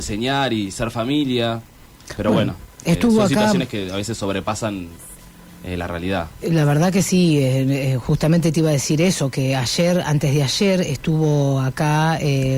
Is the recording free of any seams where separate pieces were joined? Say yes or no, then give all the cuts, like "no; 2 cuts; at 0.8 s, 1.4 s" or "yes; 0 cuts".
yes; 0 cuts